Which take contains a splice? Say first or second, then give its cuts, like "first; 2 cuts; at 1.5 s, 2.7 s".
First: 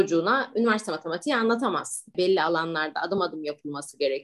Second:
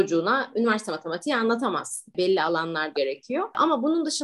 second; 1 cut; at 2.9 s